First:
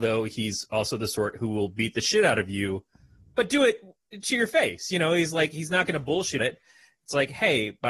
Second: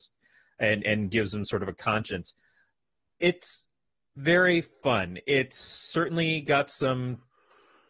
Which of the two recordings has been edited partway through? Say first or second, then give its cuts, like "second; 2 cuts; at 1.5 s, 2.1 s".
first; 1 cut; at 6.4 s